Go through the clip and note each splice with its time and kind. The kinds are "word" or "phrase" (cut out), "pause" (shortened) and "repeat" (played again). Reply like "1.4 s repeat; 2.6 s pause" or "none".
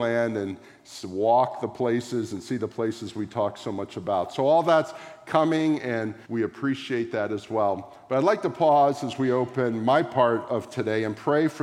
6.2 s pause